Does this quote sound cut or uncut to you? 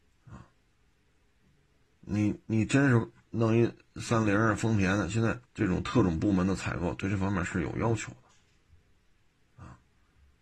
cut